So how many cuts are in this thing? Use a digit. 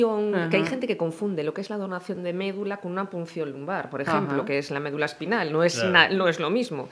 0